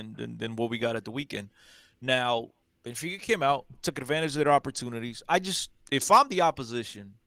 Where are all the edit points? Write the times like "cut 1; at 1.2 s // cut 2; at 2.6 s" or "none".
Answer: cut 1; at 2.6 s // cut 2; at 5.8 s